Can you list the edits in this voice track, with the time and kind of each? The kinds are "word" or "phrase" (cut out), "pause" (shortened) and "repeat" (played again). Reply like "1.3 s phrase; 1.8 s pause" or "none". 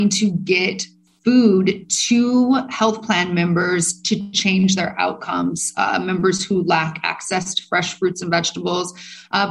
none

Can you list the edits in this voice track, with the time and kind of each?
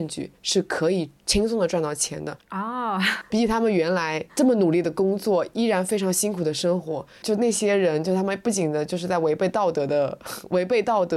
4.3 s pause

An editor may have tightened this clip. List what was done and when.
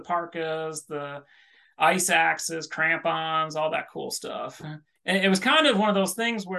none

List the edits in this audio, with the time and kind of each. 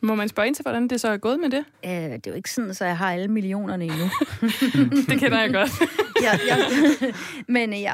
1.7 s pause

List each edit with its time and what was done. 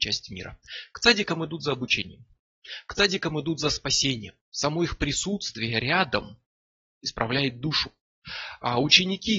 none

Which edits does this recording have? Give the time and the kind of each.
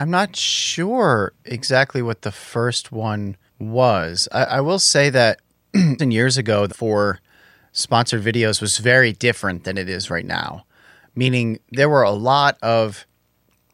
3.5 s pause; 6.0 s phrase; 6.7 s word

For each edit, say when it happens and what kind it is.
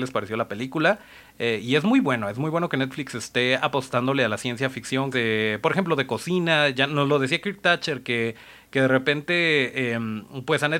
5.1 s phrase

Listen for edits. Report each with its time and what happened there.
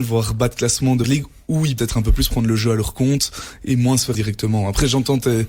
1.0 s word; 1.8 s word; 4.1 s word

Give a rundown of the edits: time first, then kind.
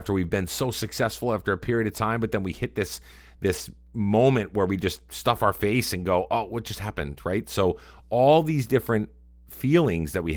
none

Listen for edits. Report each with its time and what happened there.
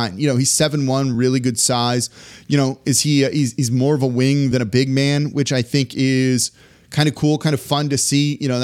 none

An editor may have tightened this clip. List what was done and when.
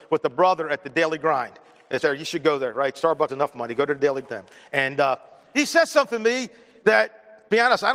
2.0 s word; 3.3 s word; 4.2 s phrase; 5.5 s word

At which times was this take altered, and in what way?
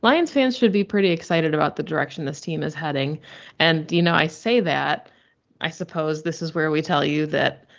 5.6 s word

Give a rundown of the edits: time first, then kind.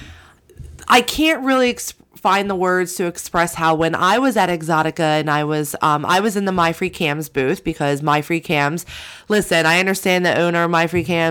none

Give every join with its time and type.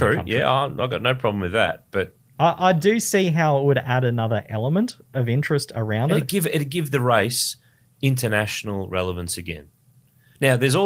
none

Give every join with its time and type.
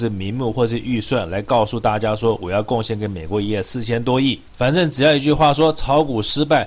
none

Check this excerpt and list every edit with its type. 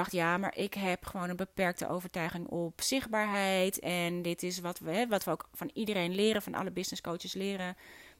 none

